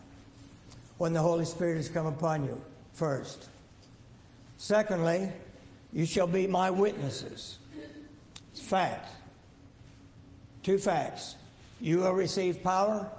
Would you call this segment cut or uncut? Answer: uncut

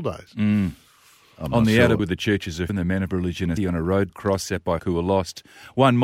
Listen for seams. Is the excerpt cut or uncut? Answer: cut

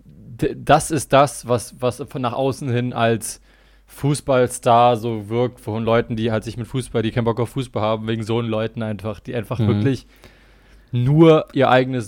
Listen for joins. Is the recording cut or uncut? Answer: uncut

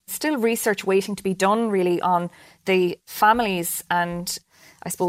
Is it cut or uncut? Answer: uncut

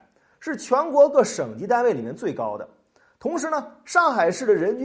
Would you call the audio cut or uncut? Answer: uncut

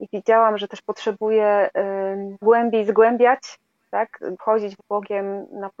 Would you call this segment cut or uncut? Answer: cut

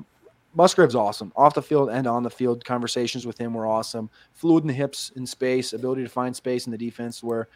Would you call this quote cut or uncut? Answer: uncut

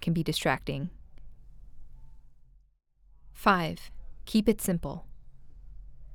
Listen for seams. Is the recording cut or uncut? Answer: uncut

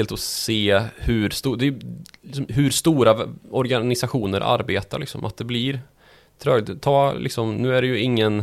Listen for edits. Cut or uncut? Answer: uncut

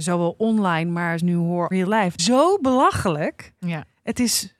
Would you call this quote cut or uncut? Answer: cut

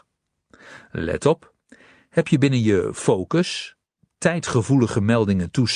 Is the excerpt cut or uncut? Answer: uncut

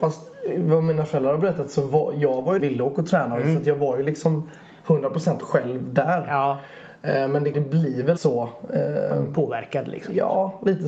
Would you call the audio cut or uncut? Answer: cut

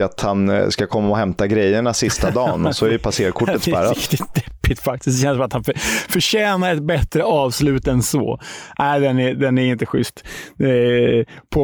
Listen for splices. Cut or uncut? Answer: uncut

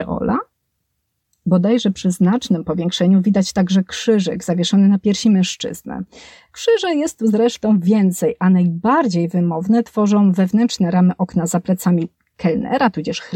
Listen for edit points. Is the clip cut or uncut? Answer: uncut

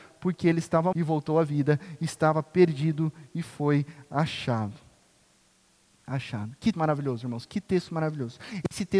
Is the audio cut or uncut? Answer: cut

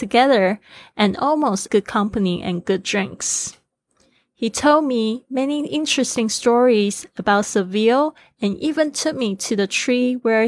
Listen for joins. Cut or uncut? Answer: cut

